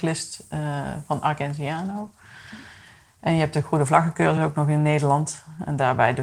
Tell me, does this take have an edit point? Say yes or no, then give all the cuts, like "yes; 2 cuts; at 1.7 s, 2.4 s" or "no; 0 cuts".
no; 0 cuts